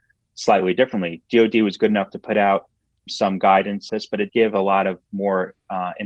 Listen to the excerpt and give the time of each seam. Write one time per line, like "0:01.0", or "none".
0:03.1
0:03.9
0:04.3